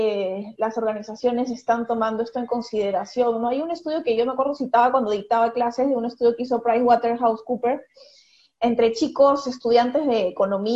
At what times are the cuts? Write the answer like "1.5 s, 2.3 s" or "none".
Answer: none